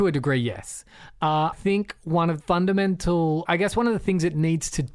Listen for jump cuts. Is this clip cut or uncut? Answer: cut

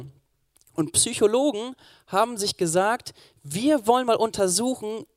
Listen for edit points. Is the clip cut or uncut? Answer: uncut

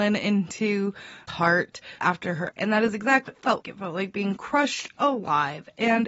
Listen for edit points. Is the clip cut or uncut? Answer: cut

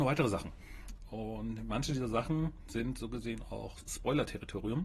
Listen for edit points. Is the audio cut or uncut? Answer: uncut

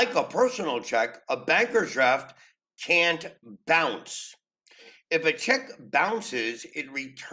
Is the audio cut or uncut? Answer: uncut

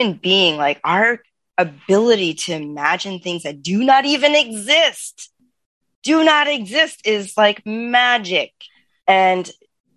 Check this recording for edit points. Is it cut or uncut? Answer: uncut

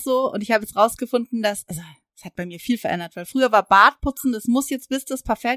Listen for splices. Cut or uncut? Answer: uncut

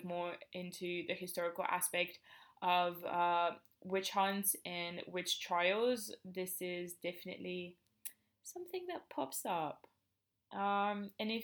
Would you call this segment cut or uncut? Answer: uncut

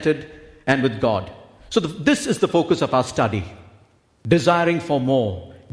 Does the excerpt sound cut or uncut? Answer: uncut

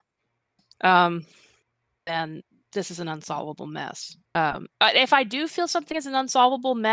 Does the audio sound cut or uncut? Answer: cut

